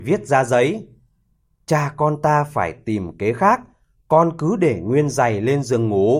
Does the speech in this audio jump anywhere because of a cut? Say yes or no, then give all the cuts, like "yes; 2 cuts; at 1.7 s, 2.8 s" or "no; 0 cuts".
no; 0 cuts